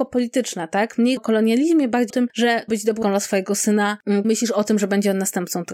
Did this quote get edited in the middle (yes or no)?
yes